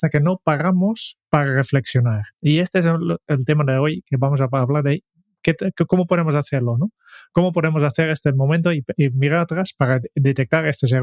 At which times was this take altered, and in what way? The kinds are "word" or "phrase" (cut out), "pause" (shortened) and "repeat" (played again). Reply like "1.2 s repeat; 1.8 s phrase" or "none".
2.3 s pause